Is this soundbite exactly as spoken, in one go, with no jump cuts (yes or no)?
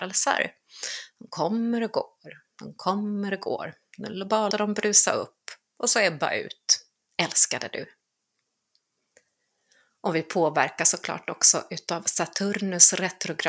no